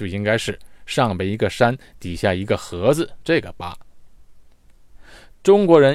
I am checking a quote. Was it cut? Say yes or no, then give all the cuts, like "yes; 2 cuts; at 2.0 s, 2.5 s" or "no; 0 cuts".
no; 0 cuts